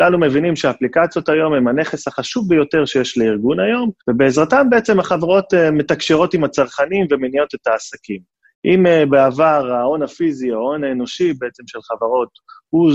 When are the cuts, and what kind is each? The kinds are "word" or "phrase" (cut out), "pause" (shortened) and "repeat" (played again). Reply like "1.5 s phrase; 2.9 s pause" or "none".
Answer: 4.0 s pause; 8.4 s pause